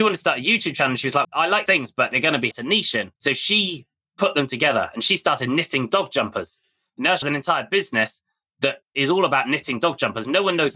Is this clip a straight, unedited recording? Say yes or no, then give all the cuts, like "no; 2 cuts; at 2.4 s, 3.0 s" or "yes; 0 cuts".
no; 6 cuts; at 1.2 s, 1.7 s, 2.5 s, 3.2 s, 7.2 s, 8.8 s